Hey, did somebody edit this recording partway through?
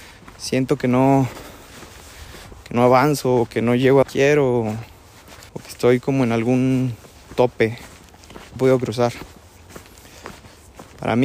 yes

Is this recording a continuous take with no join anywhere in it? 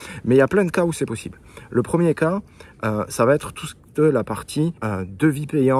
no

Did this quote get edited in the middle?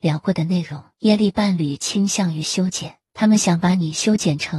yes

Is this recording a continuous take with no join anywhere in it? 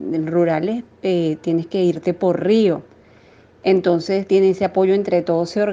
yes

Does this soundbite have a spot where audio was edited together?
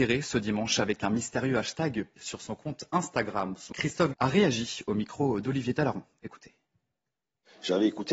yes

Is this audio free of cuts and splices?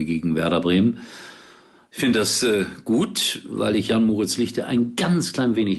yes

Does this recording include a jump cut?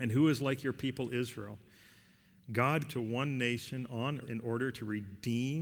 yes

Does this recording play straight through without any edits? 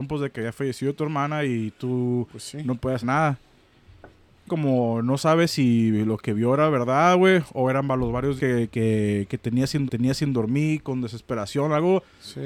no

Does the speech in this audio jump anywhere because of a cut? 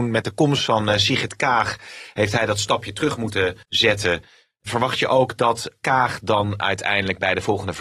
yes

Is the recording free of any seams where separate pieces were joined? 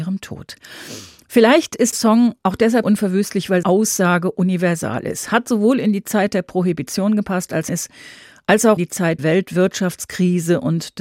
no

